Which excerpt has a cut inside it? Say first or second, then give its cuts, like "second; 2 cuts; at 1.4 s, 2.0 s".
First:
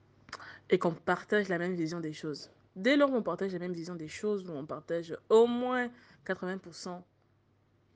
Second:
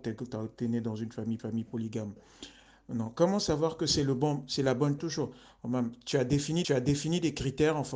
second; 3 cuts; at 1.4 s, 5.0 s, 6.6 s